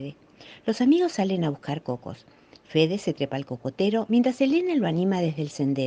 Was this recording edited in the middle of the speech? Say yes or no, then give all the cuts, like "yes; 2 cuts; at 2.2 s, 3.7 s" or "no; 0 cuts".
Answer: no; 0 cuts